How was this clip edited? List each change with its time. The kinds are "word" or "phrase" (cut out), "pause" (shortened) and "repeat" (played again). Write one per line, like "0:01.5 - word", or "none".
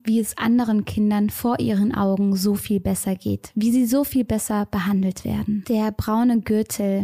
none